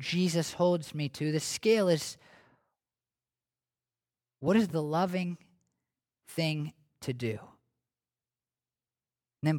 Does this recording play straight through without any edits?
yes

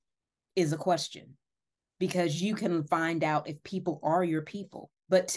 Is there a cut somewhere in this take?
no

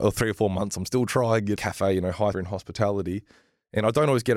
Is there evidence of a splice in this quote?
yes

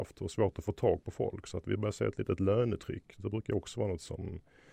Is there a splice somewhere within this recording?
no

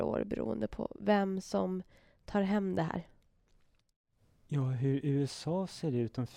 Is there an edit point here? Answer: no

